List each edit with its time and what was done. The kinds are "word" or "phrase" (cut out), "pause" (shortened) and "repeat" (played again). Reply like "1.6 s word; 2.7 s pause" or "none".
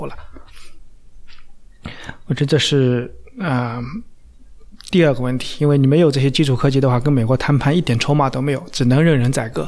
none